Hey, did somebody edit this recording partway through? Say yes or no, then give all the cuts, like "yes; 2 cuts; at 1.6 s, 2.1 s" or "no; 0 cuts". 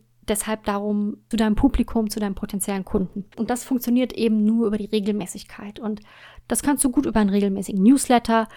yes; 2 cuts; at 1.3 s, 3.3 s